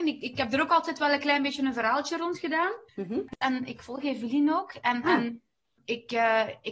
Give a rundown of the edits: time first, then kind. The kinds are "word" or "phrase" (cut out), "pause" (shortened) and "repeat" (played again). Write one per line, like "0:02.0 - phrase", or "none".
0:02.9 - pause